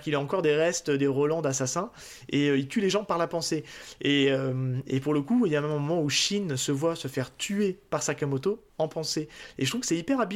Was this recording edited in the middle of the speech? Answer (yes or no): yes